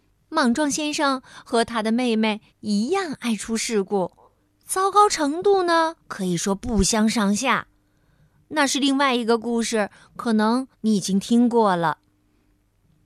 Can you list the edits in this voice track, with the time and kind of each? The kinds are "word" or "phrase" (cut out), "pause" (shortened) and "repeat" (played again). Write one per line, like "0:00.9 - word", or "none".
0:02.5 - pause
0:04.4 - pause
0:06.0 - pause
0:10.7 - pause